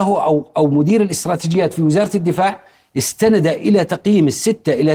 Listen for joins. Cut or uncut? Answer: uncut